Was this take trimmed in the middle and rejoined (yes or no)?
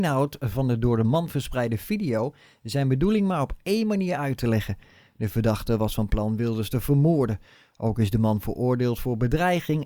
no